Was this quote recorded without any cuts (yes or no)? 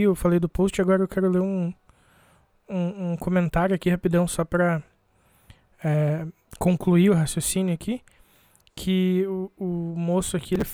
yes